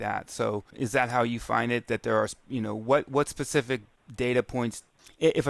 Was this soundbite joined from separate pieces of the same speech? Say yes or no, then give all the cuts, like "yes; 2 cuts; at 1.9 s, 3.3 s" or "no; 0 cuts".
no; 0 cuts